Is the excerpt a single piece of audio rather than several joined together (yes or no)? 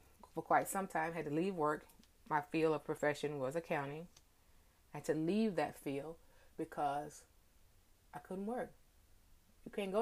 yes